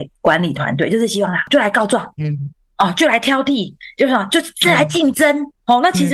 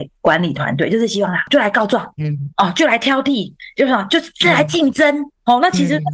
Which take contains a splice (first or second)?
second